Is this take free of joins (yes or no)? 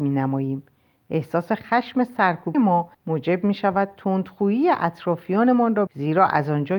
no